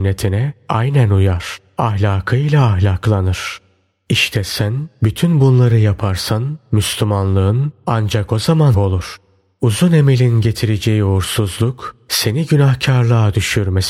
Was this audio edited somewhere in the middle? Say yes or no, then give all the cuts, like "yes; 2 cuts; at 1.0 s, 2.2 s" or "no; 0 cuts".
yes; 1 cut; at 8.7 s